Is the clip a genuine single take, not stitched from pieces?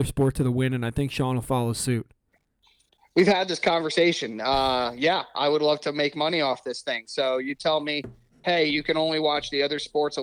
yes; 0 cuts

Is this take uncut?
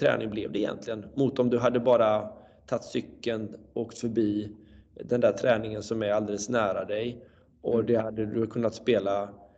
yes; 0 cuts

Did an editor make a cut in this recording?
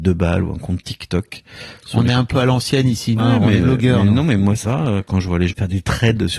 yes; 4 cuts; at 3.2 s, 3.6 s, 4.6 s, 5.5 s

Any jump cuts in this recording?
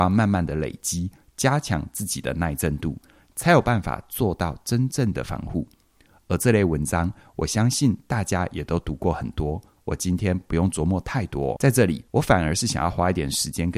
yes; 2 cuts; at 11.6 s, 12.1 s

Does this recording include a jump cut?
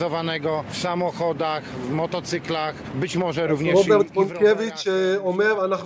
no; 0 cuts

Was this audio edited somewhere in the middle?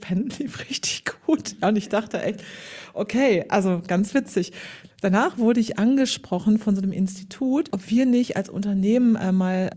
no; 0 cuts

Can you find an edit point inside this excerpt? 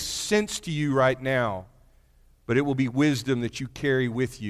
no; 0 cuts

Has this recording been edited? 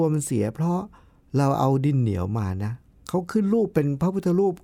no; 0 cuts

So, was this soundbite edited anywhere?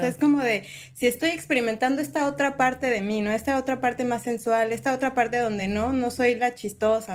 no; 0 cuts

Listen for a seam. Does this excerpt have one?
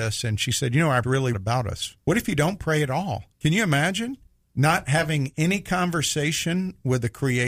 yes; 5 cuts; at 1.0 s, 1.3 s, 2.0 s, 3.3 s, 4.3 s

